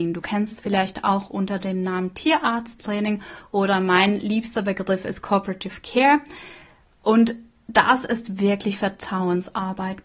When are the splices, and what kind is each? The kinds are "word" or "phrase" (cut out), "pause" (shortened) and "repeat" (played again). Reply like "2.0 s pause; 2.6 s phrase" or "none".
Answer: none